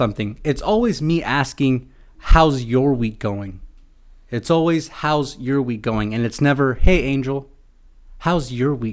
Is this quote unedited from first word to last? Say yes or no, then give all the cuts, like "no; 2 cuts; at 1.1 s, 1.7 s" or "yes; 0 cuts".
yes; 0 cuts